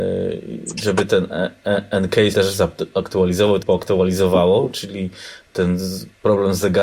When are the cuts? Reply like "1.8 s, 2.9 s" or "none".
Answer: 2.3 s, 3.6 s